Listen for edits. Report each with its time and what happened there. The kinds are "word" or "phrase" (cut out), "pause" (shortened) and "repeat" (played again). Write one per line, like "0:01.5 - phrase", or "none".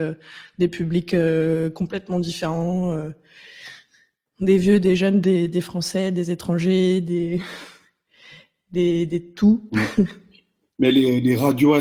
none